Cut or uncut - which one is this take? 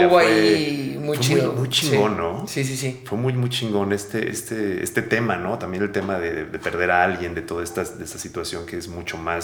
uncut